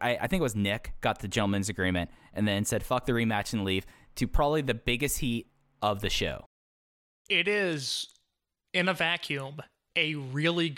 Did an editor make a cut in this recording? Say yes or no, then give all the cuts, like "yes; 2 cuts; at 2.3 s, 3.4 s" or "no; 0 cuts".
no; 0 cuts